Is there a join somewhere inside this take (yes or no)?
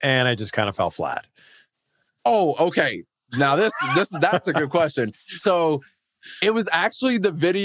no